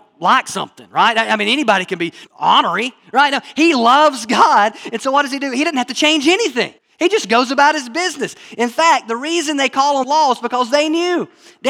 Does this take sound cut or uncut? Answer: cut